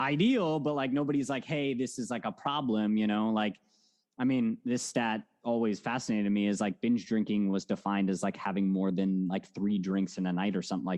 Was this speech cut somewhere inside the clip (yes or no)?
no